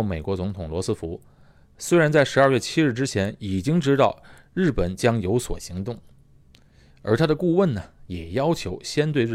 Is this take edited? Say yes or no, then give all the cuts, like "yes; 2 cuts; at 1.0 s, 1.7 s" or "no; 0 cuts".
no; 0 cuts